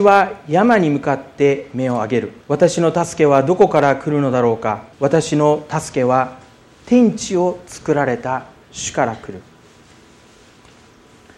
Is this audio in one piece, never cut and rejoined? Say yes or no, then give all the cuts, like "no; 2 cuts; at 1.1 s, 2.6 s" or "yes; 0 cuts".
no; 2 cuts; at 2.4 s, 4.9 s